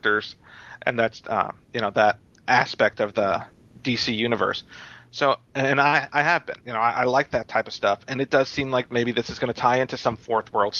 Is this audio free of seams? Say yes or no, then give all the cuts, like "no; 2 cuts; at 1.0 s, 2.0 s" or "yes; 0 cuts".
yes; 0 cuts